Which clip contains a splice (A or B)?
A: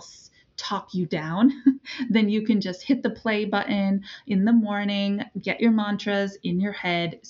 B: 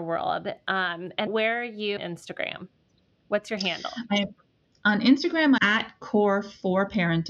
B